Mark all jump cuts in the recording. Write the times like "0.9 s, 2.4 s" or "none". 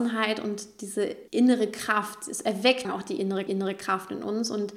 1.3 s, 2.8 s, 3.5 s